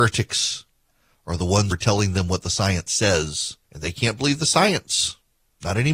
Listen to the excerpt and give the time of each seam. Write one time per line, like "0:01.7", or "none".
0:01.7
0:03.6